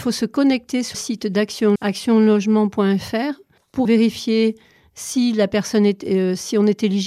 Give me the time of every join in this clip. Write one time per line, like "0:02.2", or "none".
0:00.9
0:01.8
0:03.8